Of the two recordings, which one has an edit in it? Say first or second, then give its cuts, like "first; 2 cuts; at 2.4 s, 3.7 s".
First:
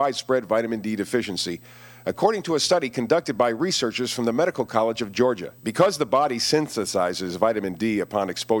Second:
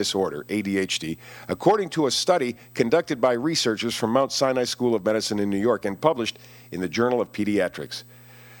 first; 1 cut; at 5.6 s